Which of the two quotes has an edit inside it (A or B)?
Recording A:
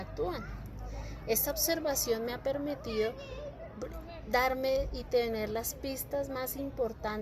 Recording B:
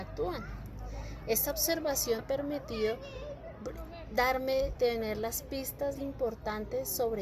B